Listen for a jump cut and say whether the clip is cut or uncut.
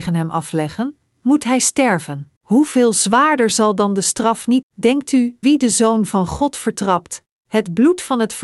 cut